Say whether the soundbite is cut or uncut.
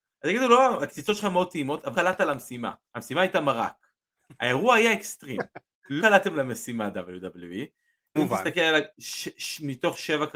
cut